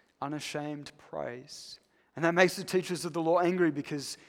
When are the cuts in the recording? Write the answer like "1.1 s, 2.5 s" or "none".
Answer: 2.0 s